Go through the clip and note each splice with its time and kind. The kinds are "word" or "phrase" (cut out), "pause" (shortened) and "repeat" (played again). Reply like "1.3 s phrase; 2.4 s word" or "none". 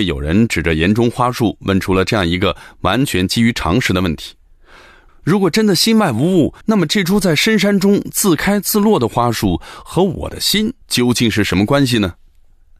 6.6 s pause; 10.8 s pause